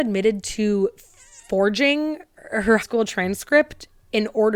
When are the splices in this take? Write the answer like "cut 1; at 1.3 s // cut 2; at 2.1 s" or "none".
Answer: cut 1; at 2.8 s